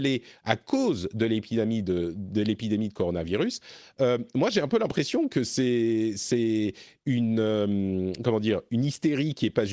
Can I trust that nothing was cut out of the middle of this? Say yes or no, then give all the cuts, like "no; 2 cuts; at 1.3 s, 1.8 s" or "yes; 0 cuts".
yes; 0 cuts